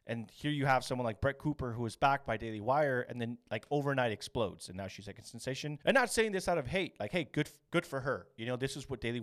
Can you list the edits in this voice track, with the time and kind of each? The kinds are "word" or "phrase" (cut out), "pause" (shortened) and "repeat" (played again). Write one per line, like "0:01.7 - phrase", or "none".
0:05.8 - pause